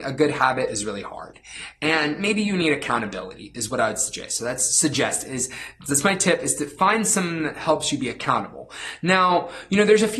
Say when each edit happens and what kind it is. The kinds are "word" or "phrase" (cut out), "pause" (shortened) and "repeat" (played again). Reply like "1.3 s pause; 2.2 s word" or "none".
none